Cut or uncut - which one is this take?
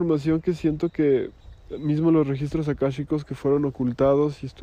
uncut